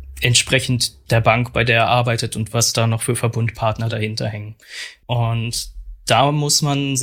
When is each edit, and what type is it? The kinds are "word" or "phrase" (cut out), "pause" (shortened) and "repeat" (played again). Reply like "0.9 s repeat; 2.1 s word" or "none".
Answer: none